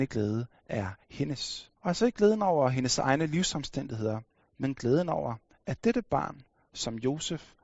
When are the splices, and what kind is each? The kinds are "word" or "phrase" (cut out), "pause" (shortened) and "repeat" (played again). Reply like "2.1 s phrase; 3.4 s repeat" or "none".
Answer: 1.8 s pause; 4.3 s pause